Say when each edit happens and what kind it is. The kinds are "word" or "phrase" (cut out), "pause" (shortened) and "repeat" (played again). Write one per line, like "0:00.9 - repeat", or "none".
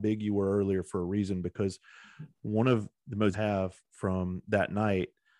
0:02.3 - pause
0:03.3 - phrase